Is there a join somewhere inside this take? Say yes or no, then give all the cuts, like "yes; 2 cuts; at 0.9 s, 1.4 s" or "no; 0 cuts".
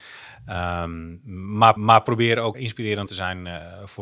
yes; 3 cuts; at 1.8 s, 2.5 s, 3.1 s